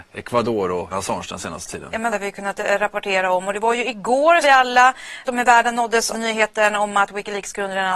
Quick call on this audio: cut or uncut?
cut